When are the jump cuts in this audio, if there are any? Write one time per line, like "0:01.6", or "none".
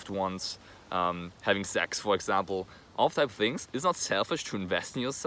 0:01.3
0:03.2
0:03.7